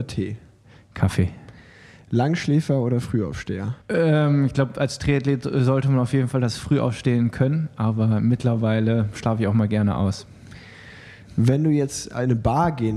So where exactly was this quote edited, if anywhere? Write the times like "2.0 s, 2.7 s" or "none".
3.8 s